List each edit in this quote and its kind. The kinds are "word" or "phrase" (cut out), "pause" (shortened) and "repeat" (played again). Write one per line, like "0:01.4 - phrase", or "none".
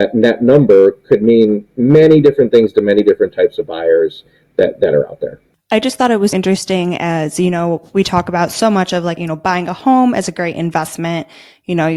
0:06.3 - word
0:09.2 - word